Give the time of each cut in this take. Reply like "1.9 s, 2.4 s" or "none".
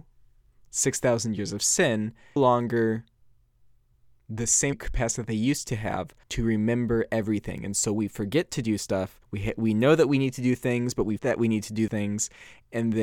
2.4 s, 4.7 s, 6.2 s, 9.2 s, 11.2 s, 11.9 s

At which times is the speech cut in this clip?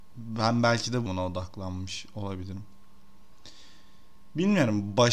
1.1 s

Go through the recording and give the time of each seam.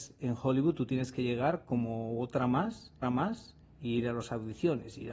3.0 s

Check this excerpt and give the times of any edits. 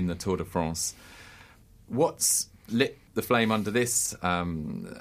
1.6 s, 3.1 s

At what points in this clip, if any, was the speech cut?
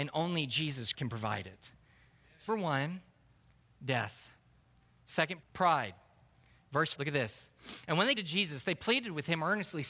0.9 s, 2.5 s, 5.4 s, 6.9 s, 8.2 s

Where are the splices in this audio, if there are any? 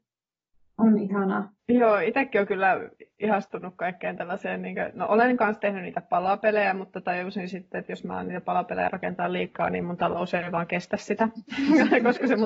1.6 s

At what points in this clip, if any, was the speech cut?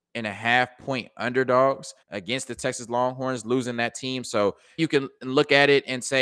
2.0 s, 4.8 s

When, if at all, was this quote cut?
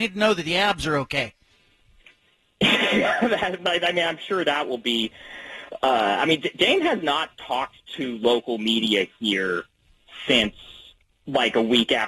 none

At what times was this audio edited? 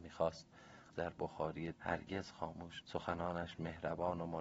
0.9 s, 1.7 s, 2.8 s

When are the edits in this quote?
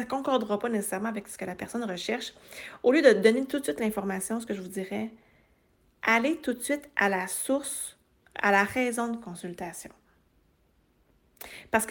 none

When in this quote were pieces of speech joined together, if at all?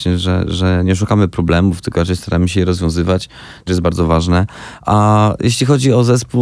3.7 s

